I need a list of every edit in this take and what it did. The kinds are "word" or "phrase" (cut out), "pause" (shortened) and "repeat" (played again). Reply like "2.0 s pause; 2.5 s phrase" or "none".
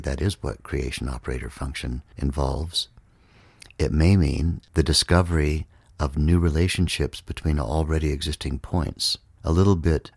none

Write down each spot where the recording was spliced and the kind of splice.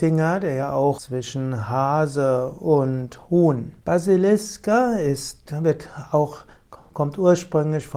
1.0 s phrase; 3.8 s pause

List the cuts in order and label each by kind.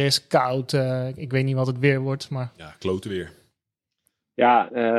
none

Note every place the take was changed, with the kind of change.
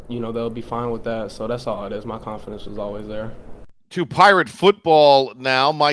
3.8 s pause

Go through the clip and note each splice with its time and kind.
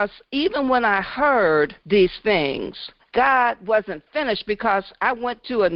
1.8 s pause; 3.0 s pause

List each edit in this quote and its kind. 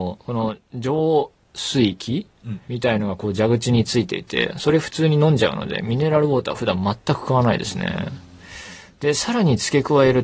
2.6 s pause

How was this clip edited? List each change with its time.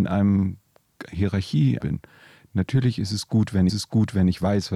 1.8 s phrase; 3.7 s repeat

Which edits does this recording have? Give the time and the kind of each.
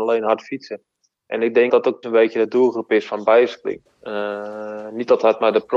1.7 s word; 2.0 s word; 3.9 s pause

